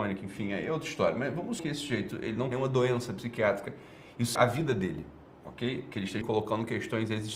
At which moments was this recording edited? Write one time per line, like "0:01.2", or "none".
0:01.6
0:02.5
0:04.4
0:06.2